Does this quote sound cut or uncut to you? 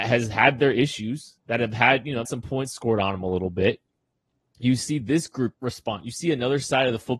cut